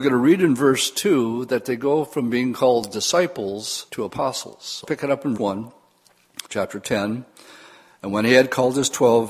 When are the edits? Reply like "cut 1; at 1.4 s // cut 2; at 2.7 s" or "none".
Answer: cut 1; at 3.9 s // cut 2; at 4.8 s // cut 3; at 5.4 s // cut 4; at 6.5 s